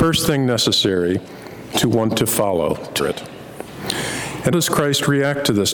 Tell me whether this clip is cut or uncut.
cut